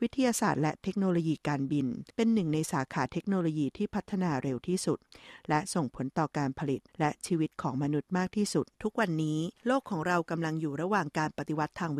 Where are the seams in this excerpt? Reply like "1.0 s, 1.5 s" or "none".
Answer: 2.1 s, 6.9 s, 8.7 s, 9.6 s

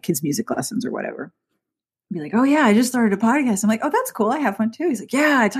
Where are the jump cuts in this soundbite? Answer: none

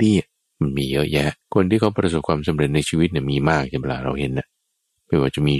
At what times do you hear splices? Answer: 1.4 s

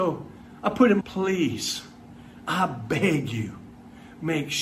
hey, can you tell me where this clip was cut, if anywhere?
1.0 s

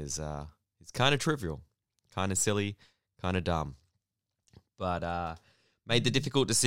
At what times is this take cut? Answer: none

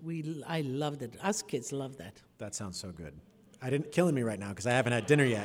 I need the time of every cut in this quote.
3.9 s

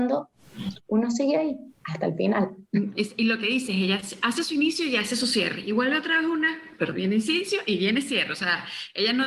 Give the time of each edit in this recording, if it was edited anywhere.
none

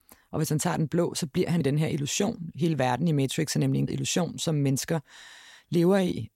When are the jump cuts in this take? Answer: 1.6 s, 3.9 s

